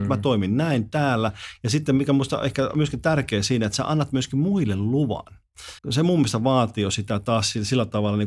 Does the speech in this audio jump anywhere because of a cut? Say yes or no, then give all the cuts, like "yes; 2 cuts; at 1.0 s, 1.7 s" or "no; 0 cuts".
yes; 1 cut; at 5.8 s